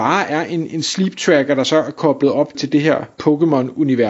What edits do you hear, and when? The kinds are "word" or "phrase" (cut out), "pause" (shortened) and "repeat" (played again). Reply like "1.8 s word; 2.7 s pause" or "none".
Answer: 2.5 s word